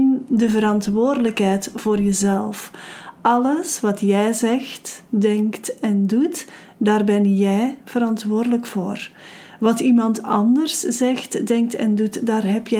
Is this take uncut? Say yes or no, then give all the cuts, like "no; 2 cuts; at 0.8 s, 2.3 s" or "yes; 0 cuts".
yes; 0 cuts